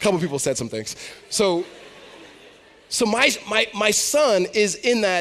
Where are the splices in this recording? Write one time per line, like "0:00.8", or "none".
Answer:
none